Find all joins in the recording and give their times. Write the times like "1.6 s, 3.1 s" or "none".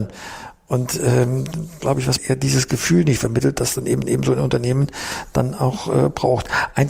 1.8 s, 2.2 s, 4.0 s